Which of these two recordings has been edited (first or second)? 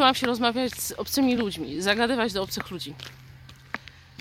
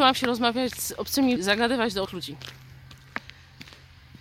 second